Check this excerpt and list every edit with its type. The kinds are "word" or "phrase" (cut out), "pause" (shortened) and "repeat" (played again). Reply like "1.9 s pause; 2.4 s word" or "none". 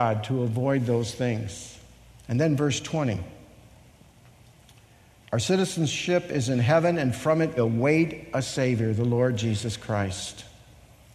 2.1 s pause; 7.6 s word